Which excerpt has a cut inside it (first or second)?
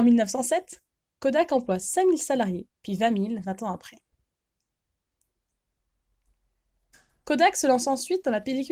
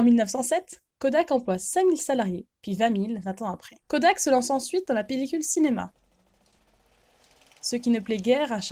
second